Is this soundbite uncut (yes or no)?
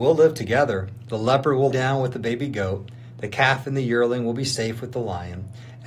no